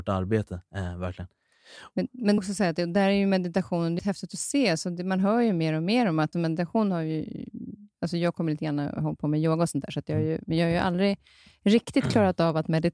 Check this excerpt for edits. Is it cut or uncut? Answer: cut